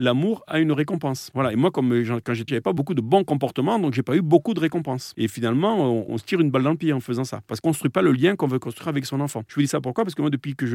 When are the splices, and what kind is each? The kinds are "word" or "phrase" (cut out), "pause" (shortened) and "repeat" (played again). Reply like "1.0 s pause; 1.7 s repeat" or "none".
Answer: 2.5 s word; 7.6 s word